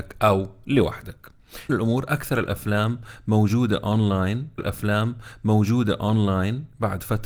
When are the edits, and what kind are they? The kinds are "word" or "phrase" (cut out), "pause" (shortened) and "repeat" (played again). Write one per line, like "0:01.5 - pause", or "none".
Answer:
0:01.7 - word
0:04.6 - repeat